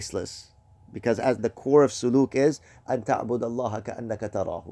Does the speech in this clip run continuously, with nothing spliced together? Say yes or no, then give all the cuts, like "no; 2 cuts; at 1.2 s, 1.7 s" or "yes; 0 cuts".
no; 1 cut; at 1.4 s